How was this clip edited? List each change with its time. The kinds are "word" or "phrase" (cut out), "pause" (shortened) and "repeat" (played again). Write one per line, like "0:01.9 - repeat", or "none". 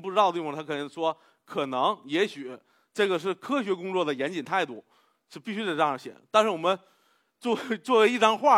none

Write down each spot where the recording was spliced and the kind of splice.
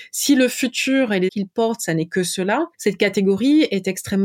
0:01.3 - word
0:02.7 - pause

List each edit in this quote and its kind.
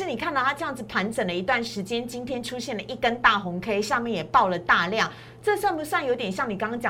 none

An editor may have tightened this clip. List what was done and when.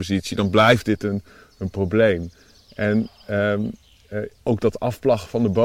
none

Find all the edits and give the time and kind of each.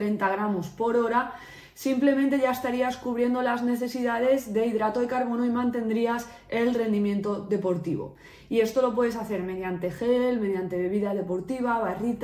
none

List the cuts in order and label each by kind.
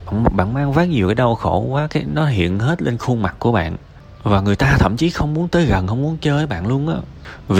none

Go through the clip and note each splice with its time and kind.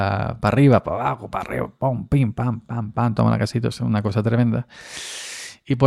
none

